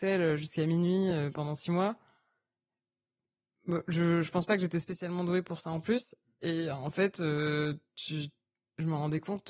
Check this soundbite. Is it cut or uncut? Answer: uncut